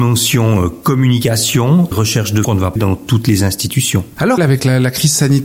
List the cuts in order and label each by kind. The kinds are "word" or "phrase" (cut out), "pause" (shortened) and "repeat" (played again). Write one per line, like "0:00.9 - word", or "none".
0:01.9 - word
0:02.4 - word
0:02.8 - word
0:04.4 - word